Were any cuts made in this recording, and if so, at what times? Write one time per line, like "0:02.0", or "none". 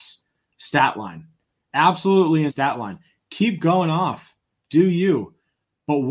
0:02.5